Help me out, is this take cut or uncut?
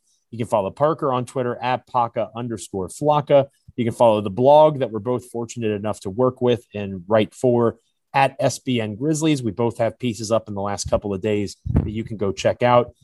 uncut